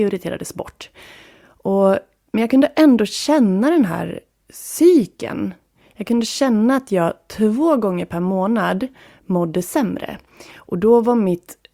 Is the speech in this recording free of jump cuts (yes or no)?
yes